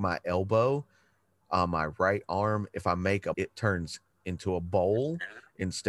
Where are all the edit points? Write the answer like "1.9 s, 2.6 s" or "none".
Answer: 3.3 s